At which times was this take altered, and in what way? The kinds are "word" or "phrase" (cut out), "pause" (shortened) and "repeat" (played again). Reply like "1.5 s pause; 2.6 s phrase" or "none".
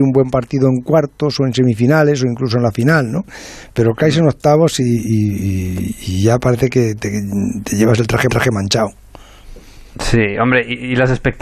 8.3 s repeat